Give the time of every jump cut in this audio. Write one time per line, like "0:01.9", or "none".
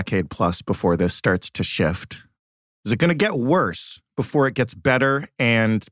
none